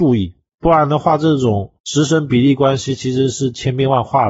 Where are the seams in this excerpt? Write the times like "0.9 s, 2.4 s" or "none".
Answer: 1.8 s